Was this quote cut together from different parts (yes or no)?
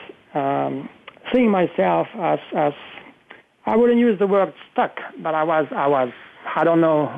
yes